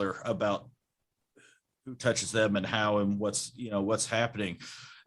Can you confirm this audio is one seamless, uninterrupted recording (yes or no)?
yes